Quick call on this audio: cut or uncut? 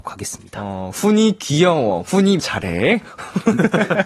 cut